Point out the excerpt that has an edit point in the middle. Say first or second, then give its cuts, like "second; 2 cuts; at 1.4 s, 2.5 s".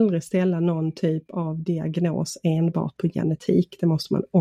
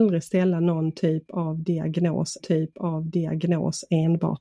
second; 1 cut; at 2.4 s